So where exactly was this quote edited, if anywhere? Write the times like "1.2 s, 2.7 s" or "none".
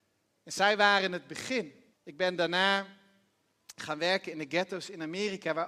1.9 s